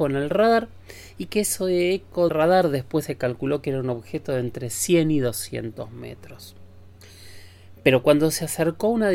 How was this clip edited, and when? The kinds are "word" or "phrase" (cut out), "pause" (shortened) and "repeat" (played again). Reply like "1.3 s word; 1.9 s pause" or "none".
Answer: 2.3 s word